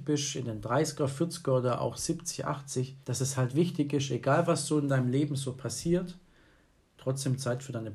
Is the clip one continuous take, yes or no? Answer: no